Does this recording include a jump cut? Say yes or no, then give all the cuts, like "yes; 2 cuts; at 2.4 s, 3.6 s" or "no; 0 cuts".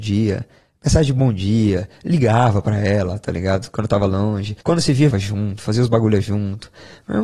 yes; 2 cuts; at 4.6 s, 5.1 s